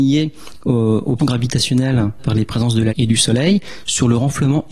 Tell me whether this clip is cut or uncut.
cut